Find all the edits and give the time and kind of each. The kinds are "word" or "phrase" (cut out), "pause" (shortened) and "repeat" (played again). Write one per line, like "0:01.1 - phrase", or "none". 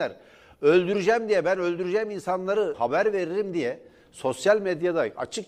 0:02.7 - phrase